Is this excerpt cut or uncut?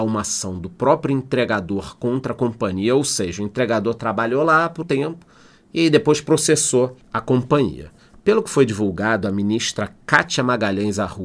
cut